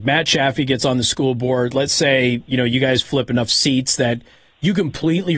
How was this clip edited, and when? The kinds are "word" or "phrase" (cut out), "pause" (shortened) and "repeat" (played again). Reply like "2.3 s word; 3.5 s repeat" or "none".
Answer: none